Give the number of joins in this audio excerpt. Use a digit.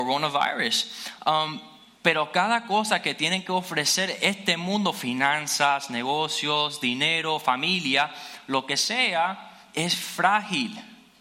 0